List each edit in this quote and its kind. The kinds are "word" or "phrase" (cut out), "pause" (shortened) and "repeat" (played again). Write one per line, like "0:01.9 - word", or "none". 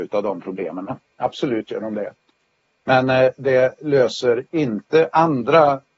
none